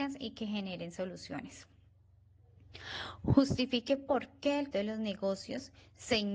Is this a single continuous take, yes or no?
no